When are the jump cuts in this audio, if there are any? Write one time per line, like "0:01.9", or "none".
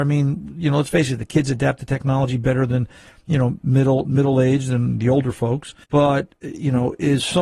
0:05.8